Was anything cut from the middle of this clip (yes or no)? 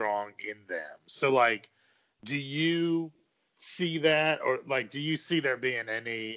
no